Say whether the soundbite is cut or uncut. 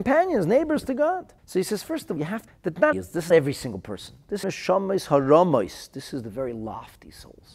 cut